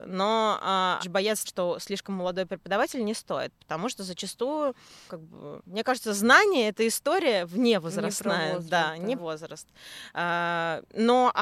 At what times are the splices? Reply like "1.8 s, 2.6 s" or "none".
1.0 s, 1.4 s, 5.1 s, 9.2 s